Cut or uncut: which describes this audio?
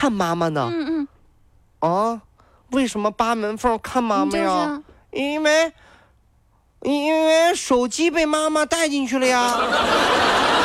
uncut